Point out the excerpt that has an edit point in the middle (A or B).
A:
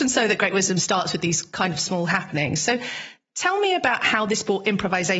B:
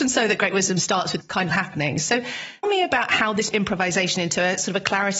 B